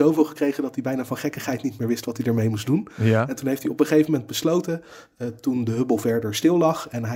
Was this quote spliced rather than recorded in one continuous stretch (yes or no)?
no